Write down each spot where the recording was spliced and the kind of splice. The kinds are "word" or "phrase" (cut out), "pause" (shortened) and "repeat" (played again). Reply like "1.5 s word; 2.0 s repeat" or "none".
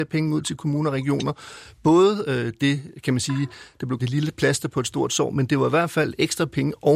4.0 s word